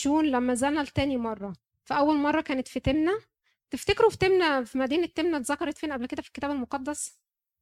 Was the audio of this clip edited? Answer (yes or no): no